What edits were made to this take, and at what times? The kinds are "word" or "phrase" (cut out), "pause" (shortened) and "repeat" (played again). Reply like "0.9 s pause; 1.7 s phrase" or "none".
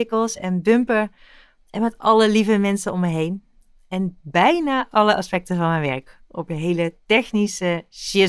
4.2 s pause